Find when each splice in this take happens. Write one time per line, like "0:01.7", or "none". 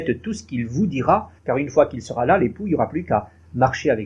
0:01.4